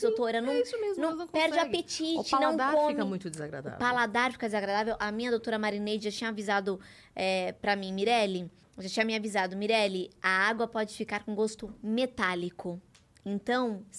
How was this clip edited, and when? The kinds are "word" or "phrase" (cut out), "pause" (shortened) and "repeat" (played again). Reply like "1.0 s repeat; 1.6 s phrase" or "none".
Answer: 8.6 s pause

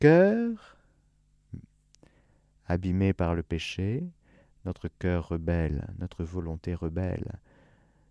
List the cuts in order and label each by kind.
none

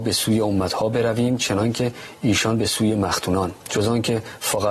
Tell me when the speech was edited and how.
3.6 s pause

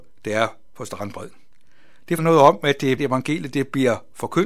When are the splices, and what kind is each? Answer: 2.2 s word; 3.0 s word

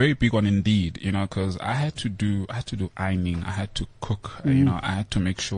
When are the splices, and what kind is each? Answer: none

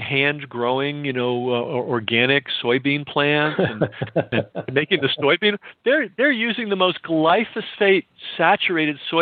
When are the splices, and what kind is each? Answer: none

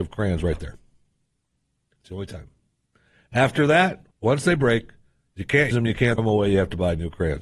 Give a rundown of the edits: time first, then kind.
4.1 s pause; 5.7 s word; 6.2 s word

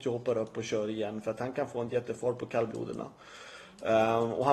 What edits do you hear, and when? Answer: none

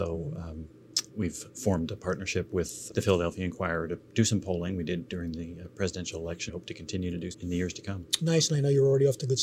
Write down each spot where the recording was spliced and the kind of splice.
2.9 s word; 4.1 s pause; 6.5 s phrase; 7.3 s word

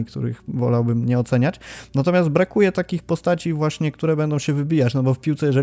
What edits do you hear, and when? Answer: none

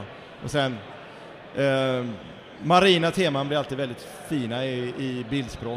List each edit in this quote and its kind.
none

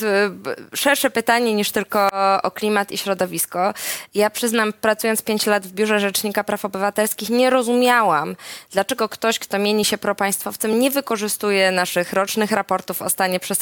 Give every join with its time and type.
none

